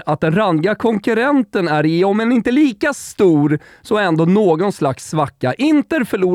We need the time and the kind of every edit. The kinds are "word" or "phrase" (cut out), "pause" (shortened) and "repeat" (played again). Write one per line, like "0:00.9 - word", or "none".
none